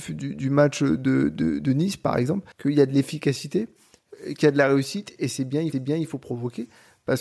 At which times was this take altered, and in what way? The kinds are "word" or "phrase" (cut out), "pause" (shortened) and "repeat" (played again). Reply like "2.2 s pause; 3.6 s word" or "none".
2.5 s pause; 5.7 s repeat